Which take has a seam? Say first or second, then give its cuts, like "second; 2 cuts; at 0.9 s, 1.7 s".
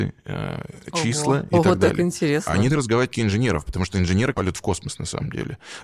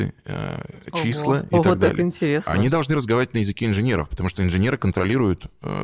first; 3 cuts; at 2.7 s, 3.1 s, 4.3 s